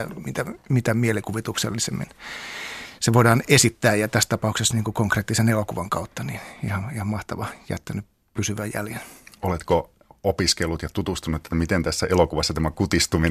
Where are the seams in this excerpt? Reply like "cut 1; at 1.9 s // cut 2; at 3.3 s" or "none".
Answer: none

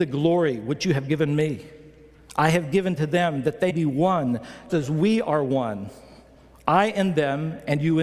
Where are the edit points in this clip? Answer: cut 1; at 3.7 s // cut 2; at 4.7 s

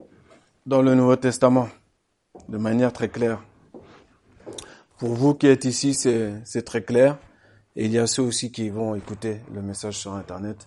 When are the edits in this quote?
none

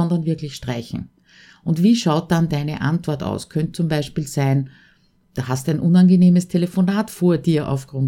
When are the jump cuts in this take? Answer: none

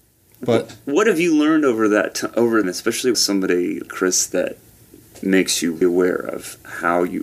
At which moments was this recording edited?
cut 1; at 2.6 s // cut 2; at 3.1 s // cut 3; at 3.9 s // cut 4; at 5.8 s

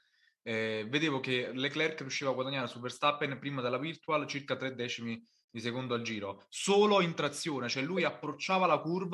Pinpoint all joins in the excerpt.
none

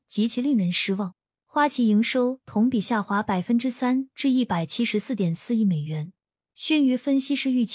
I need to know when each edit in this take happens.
cut 1; at 1.3 s

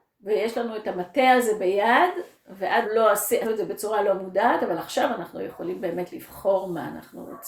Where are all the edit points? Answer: cut 1; at 2.8 s // cut 2; at 3.4 s

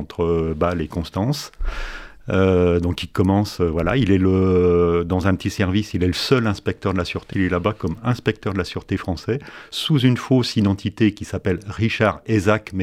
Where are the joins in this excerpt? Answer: cut 1; at 7.3 s

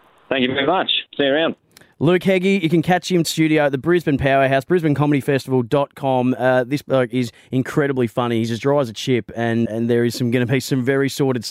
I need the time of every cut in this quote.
cut 1; at 3.2 s // cut 2; at 9.7 s

